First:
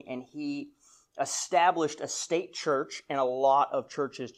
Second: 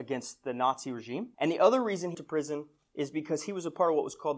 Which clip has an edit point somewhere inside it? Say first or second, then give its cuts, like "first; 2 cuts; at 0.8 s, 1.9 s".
second; 2 cuts; at 1.3 s, 2.1 s